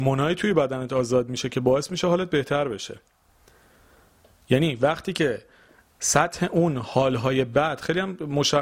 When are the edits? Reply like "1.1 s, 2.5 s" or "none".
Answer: none